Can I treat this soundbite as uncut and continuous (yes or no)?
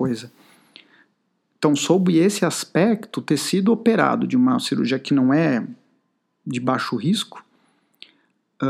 yes